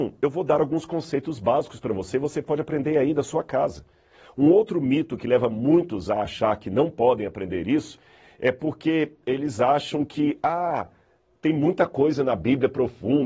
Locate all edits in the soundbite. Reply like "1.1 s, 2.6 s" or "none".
none